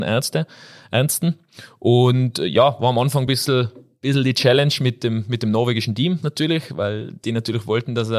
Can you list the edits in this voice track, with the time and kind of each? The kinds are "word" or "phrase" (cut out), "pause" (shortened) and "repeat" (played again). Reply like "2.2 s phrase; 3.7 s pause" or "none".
none